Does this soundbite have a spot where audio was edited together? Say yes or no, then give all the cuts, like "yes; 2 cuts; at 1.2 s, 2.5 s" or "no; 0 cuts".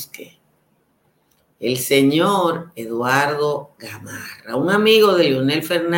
no; 0 cuts